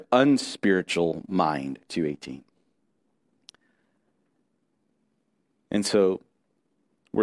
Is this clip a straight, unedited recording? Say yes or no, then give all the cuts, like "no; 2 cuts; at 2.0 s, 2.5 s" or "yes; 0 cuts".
no; 1 cut; at 1.9 s